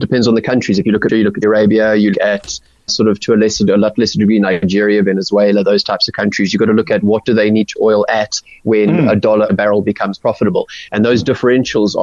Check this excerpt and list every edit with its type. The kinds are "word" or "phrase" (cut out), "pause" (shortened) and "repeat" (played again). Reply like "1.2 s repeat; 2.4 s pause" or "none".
1.1 s word; 1.4 s word; 2.1 s word; 2.9 s word; 7.8 s word; 9.5 s word